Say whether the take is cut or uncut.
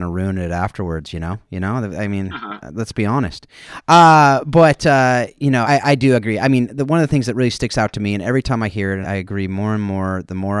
cut